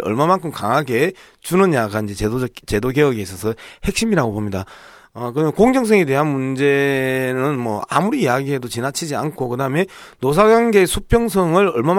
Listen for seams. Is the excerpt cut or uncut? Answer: uncut